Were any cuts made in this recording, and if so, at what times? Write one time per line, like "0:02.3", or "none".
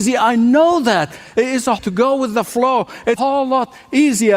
0:01.8
0:03.2

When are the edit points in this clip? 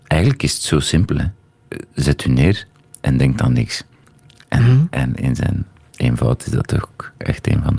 none

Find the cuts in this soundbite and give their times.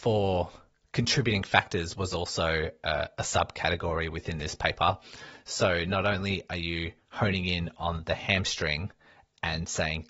none

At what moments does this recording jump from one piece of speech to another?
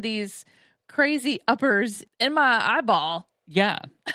0:02.1

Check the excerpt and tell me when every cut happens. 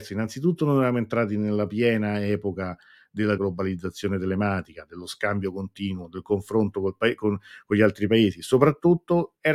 0:03.4

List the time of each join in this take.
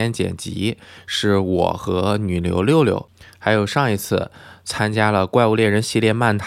none

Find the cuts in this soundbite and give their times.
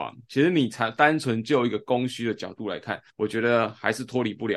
0:03.1

